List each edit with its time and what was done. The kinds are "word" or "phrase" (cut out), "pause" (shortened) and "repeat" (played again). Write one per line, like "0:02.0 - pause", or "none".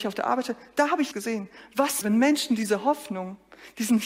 0:01.1 - word
0:02.0 - word

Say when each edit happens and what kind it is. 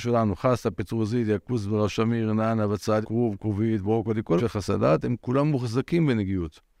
0:03.0 - word
0:04.4 - word

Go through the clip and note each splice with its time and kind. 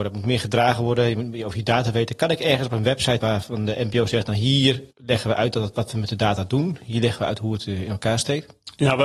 0:03.2 - word
0:04.9 - pause

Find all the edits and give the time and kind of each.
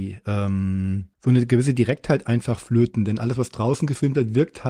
0:01.1 - pause

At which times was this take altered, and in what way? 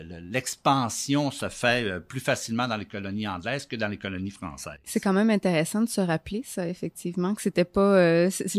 none

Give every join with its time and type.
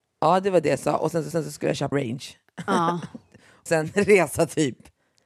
0:01.3 - repeat
0:01.9 - word
0:03.7 - word

